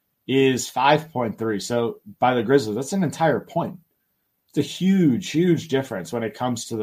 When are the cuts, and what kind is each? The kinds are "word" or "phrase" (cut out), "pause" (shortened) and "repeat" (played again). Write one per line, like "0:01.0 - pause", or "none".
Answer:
none